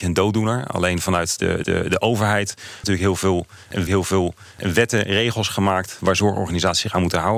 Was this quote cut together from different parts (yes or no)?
yes